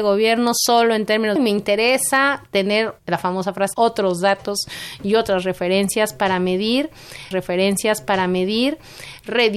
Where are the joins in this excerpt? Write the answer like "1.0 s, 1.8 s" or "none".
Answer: 1.4 s, 3.0 s, 3.7 s, 7.3 s